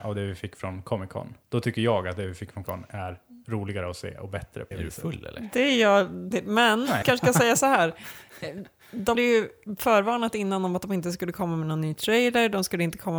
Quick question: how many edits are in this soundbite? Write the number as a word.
six